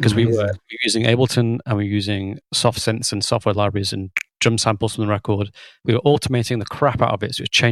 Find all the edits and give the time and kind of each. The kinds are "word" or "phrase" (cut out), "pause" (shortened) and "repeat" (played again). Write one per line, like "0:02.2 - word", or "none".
none